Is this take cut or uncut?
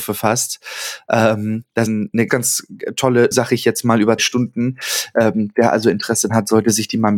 cut